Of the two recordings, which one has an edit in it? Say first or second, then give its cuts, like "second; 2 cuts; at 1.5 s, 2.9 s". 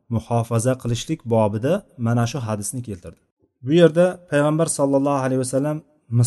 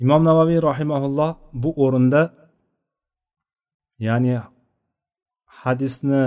first; 1 cut; at 3.3 s